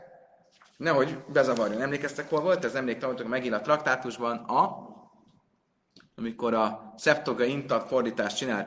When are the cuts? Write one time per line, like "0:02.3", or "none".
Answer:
none